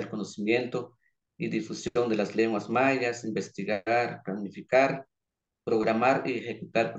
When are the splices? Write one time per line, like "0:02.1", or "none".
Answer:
none